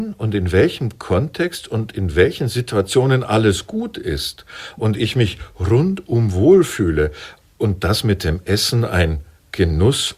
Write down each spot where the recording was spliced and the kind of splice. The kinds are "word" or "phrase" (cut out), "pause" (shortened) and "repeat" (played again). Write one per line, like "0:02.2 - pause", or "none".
none